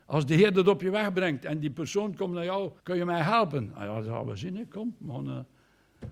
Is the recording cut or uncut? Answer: cut